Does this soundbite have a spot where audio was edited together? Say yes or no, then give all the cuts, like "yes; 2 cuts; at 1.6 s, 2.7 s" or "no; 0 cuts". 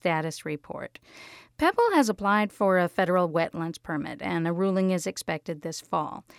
no; 0 cuts